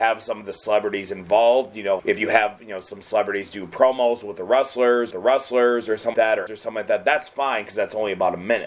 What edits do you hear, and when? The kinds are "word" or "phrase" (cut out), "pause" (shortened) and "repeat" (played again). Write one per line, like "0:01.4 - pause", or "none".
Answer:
0:02.0 - word
0:05.1 - repeat
0:06.1 - word
0:06.5 - word